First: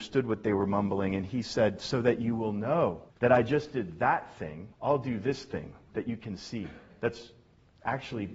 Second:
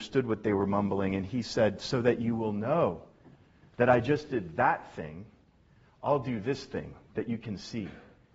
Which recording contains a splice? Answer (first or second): first